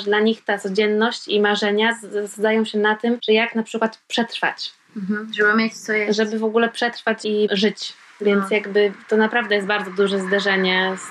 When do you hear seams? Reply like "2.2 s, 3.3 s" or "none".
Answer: none